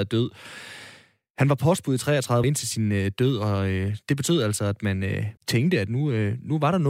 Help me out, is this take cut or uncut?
cut